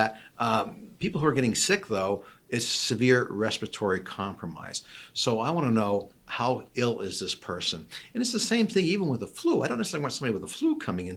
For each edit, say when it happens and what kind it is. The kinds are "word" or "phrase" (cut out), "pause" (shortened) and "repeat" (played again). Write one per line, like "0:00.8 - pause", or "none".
none

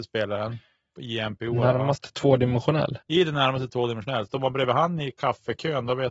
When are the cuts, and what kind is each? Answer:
0:03.0 - pause

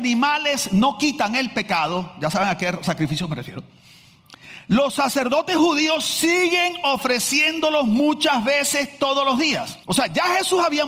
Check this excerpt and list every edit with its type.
0:09.8 - pause

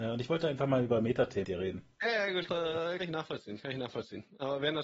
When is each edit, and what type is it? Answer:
0:01.4 - word
0:02.5 - phrase
0:03.0 - phrase

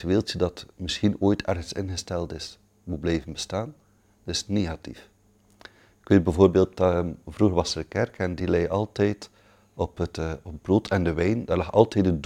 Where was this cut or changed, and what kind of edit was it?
none

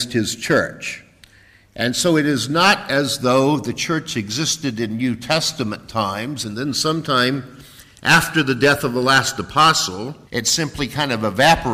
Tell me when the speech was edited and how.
0:10.3 - pause

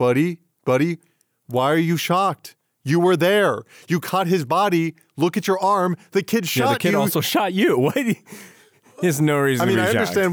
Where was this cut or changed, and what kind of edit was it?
none

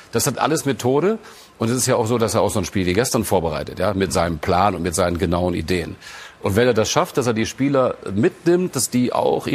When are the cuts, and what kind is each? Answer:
none

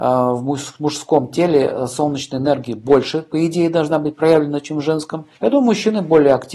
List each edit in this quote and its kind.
0:05.3 - pause

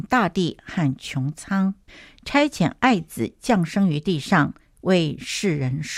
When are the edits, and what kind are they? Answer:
0:01.9 - pause

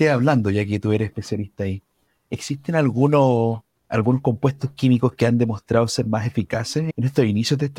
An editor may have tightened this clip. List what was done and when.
none

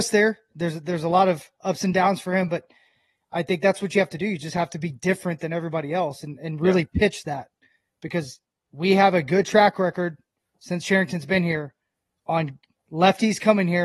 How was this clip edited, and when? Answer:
none

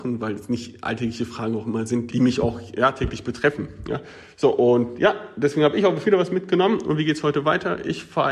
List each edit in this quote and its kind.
0:02.1 - word
0:06.0 - word

